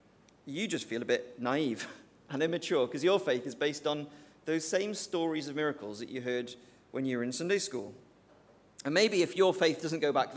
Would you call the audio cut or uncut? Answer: uncut